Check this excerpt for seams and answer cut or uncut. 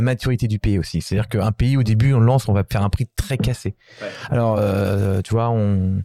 uncut